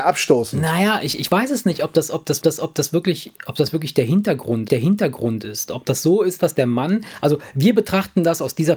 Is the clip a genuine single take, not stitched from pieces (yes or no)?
no